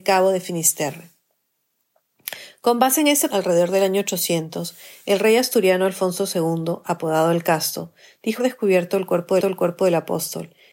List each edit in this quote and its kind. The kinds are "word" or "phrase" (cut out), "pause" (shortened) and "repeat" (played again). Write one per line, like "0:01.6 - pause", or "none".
0:03.3 - word
0:08.4 - word
0:09.4 - repeat